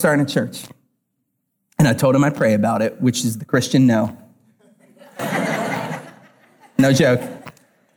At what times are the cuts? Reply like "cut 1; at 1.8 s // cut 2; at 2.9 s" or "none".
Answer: none